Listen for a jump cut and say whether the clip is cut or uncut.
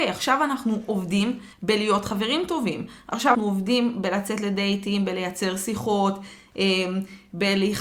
cut